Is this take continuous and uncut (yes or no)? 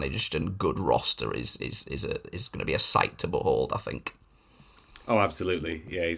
yes